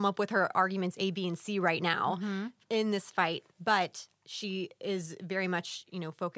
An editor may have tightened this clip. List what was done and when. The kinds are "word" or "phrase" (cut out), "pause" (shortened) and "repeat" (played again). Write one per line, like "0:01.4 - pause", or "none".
0:03.5 - pause